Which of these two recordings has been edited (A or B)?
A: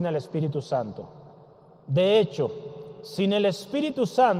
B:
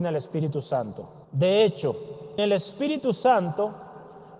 B